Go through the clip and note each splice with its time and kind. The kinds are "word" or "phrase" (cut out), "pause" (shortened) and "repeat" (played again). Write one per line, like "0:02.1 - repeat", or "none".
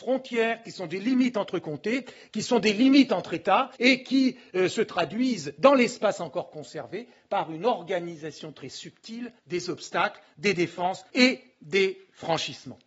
0:03.8 - pause
0:09.4 - pause
0:11.1 - pause